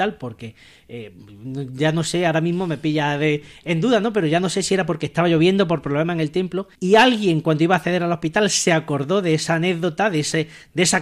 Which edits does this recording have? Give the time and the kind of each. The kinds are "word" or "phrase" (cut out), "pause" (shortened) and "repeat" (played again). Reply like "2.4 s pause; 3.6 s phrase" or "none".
6.7 s pause